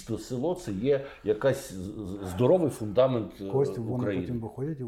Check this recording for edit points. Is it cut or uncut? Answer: uncut